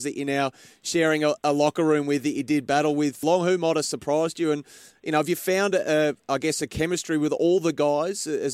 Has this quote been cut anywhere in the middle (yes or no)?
yes